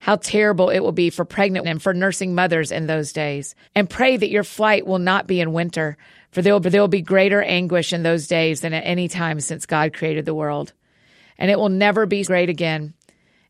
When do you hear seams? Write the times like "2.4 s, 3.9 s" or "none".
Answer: 1.6 s, 3.6 s, 6.6 s, 12.2 s